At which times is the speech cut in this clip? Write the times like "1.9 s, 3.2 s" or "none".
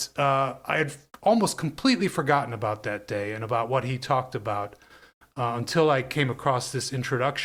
none